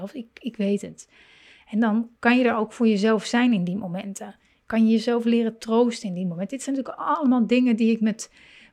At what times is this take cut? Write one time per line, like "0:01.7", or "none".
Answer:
none